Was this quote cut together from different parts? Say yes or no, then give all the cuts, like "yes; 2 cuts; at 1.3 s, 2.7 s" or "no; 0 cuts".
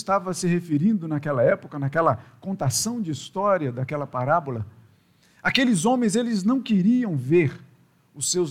no; 0 cuts